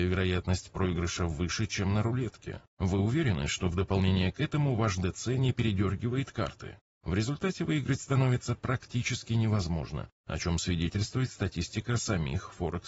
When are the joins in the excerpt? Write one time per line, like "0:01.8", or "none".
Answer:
0:02.7